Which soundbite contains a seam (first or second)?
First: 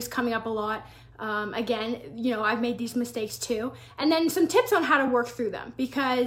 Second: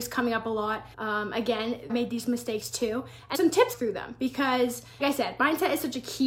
second